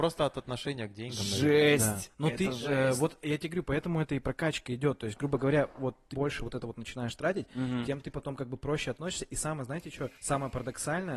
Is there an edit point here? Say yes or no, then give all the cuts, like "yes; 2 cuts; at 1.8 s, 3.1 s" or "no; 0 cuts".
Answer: yes; 2 cuts; at 6.1 s, 10.1 s